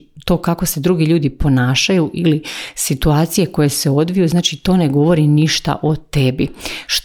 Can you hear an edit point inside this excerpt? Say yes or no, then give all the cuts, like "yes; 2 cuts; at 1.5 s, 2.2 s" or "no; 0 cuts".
no; 0 cuts